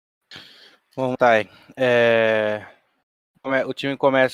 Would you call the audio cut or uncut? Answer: cut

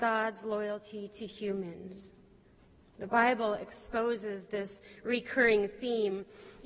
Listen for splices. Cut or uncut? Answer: uncut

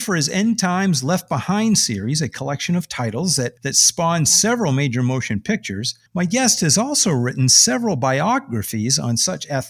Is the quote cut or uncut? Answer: cut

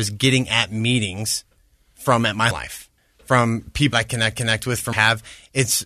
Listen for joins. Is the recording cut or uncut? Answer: cut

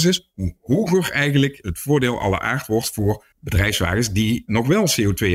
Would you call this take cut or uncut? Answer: cut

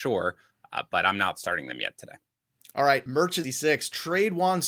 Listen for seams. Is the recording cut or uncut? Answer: cut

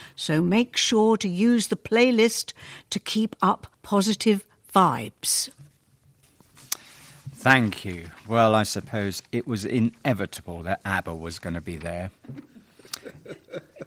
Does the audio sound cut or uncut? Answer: cut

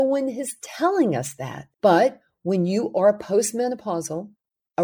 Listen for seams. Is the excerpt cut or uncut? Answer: cut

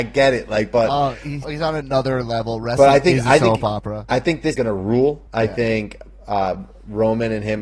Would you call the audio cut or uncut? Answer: cut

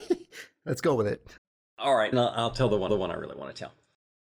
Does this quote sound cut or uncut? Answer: cut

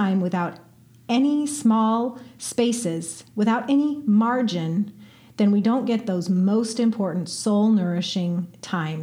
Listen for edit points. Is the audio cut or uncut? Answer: uncut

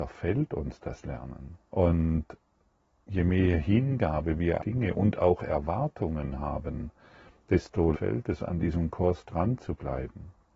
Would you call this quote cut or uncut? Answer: cut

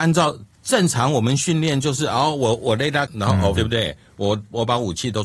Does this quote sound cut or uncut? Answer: cut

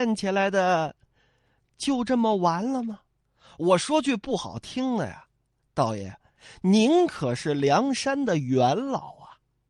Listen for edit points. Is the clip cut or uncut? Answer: uncut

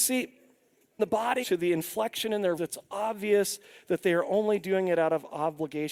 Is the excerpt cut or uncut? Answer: cut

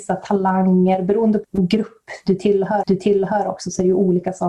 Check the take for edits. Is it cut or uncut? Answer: cut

